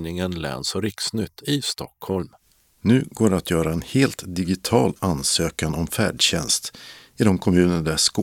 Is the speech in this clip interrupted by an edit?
no; 0 cuts

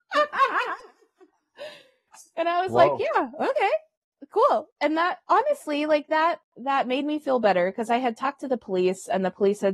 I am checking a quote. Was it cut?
yes; 1 cut; at 4.7 s

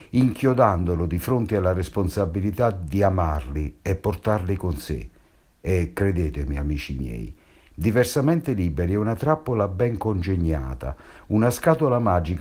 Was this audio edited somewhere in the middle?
no; 0 cuts

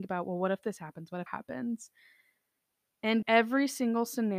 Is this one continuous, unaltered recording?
no; 2 cuts; at 1.3 s, 3.2 s

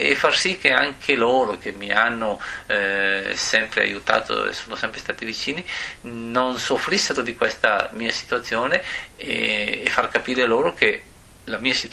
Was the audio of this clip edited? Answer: no; 0 cuts

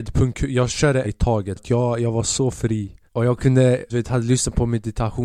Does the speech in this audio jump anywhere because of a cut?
yes; 4 cuts; at 1.0 s, 1.6 s, 3.1 s, 3.9 s

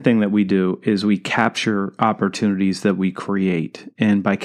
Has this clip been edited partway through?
no; 0 cuts

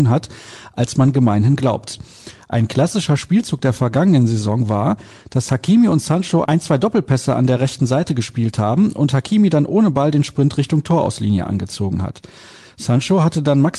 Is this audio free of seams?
yes; 0 cuts

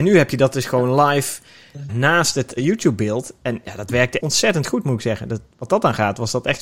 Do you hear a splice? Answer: yes; 3 cuts; at 1.9 s, 2.6 s, 4.2 s

